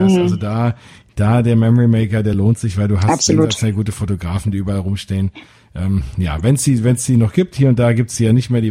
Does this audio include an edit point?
no; 0 cuts

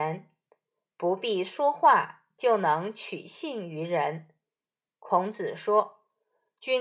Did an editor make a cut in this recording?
no; 0 cuts

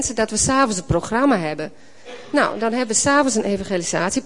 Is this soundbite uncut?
yes; 0 cuts

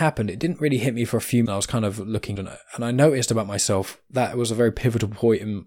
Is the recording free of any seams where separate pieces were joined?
no; 2 cuts; at 1.5 s, 2.4 s

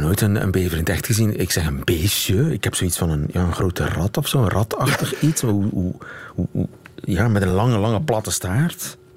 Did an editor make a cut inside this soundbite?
no; 0 cuts

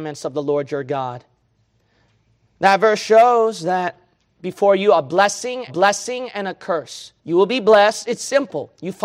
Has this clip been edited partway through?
yes; 3 cuts; at 4.3 s, 5.7 s, 7.2 s

